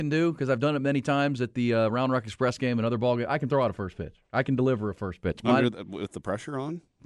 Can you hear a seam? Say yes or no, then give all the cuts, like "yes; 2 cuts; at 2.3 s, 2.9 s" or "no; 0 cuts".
yes; 1 cut; at 4.2 s